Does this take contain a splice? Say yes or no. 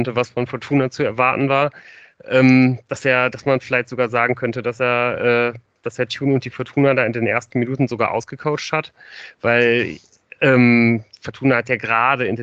no